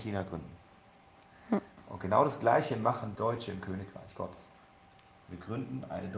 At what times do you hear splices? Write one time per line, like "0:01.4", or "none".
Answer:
0:03.2